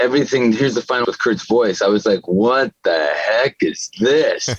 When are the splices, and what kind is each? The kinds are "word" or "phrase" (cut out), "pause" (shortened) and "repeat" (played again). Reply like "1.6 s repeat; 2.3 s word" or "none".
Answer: 1.0 s word

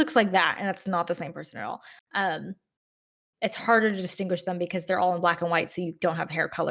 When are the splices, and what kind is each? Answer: none

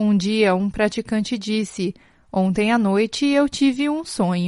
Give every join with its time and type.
none

